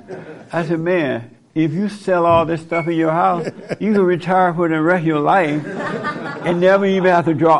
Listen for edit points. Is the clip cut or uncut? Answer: uncut